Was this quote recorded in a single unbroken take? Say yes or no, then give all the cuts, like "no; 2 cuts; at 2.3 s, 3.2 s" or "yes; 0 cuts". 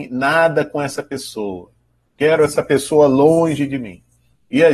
yes; 0 cuts